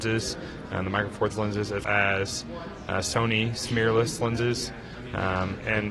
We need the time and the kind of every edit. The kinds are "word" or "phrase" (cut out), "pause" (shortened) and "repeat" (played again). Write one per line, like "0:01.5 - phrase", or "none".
0:01.3 - word
0:01.8 - word